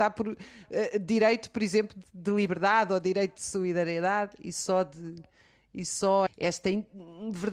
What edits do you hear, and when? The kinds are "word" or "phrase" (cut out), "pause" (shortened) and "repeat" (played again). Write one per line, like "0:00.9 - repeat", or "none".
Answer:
0:06.3 - word